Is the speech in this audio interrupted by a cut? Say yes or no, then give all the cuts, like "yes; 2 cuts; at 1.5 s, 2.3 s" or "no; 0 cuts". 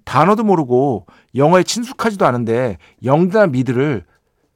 no; 0 cuts